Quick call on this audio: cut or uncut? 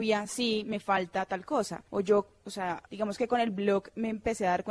cut